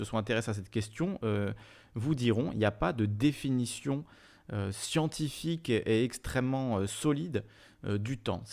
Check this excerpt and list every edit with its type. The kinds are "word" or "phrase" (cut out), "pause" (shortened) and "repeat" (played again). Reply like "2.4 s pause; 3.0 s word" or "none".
none